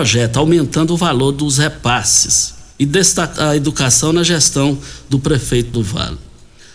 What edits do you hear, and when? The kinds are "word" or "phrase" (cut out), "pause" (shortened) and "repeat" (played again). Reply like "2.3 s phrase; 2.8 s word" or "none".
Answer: 2.7 s pause; 3.4 s word; 5.7 s word

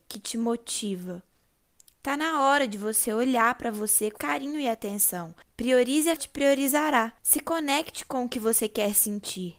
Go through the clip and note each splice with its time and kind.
4.2 s word; 5.4 s pause; 6.2 s phrase; 7.2 s pause

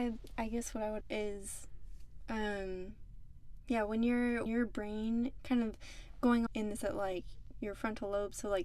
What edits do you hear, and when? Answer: 1.0 s word; 4.5 s word; 5.4 s word; 6.5 s word; 6.8 s word

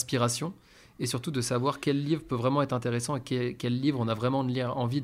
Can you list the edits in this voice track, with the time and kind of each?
none

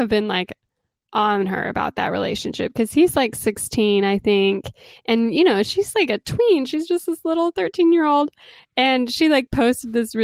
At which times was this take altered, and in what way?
none

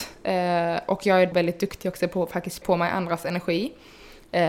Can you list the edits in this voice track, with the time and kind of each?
1.3 s word; 2.6 s word

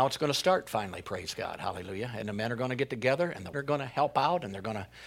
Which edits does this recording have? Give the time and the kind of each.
3.5 s word

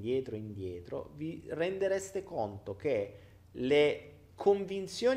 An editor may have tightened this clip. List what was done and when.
none

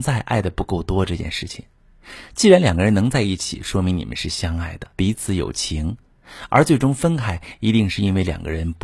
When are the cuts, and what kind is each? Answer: 4.9 s pause

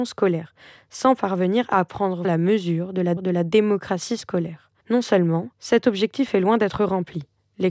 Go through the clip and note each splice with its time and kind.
2.2 s word; 3.2 s repeat; 4.8 s pause; 5.5 s pause

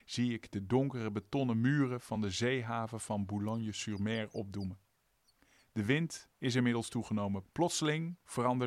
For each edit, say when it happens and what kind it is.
none

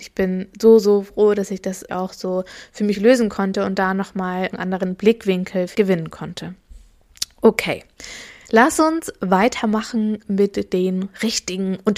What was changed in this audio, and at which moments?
1.9 s word; 4.5 s word; 5.7 s word

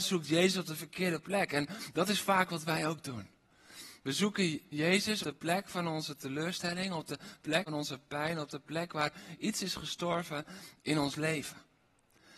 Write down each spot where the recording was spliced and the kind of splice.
5.2 s word; 7.7 s word

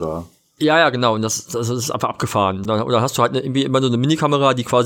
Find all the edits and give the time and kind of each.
2.6 s word

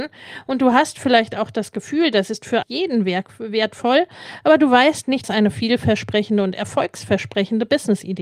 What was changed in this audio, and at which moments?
2.6 s word; 5.2 s phrase

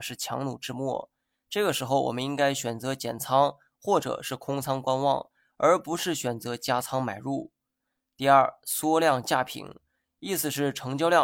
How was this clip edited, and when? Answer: none

